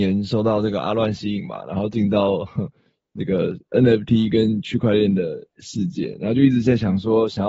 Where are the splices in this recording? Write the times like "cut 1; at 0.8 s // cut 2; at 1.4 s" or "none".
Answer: none